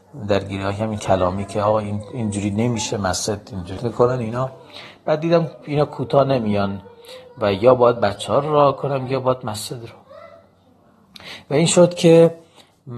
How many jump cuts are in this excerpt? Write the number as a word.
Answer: two